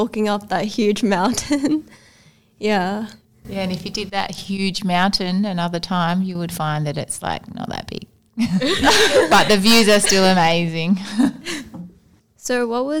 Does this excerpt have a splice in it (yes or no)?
no